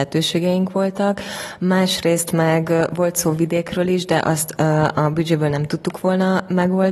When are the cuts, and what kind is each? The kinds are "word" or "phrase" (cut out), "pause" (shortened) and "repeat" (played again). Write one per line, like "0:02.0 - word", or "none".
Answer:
none